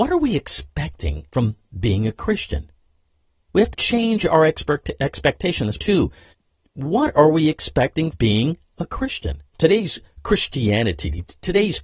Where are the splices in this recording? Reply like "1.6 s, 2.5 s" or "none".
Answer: 1.3 s, 3.7 s, 5.8 s, 6.3 s, 8.1 s